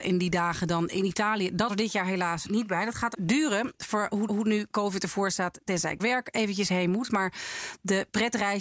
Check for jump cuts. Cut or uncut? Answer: cut